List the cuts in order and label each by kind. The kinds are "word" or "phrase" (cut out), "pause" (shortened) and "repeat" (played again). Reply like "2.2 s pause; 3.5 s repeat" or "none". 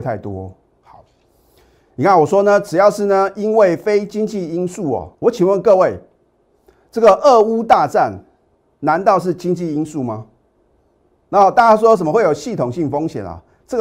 5.1 s word